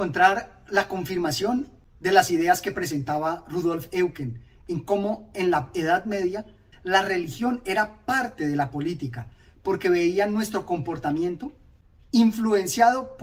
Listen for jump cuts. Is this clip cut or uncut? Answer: uncut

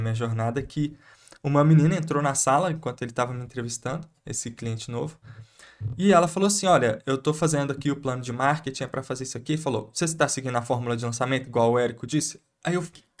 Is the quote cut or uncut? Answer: uncut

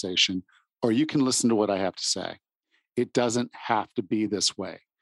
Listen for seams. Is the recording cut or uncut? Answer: uncut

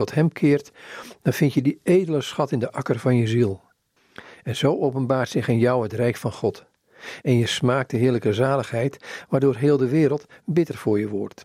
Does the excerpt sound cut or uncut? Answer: uncut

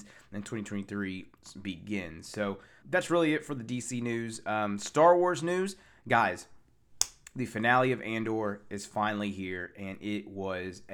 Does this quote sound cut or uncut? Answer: cut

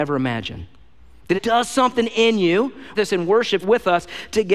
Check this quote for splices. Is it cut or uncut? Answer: cut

